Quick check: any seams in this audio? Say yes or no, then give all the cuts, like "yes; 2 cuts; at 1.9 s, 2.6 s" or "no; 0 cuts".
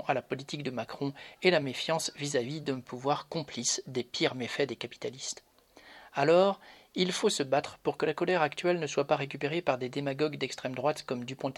no; 0 cuts